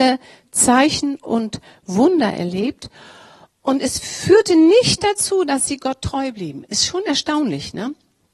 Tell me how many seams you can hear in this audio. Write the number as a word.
zero